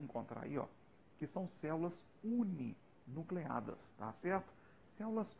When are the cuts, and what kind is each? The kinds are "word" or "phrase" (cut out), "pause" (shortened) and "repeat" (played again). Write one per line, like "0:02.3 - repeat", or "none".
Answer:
0:03.9 - pause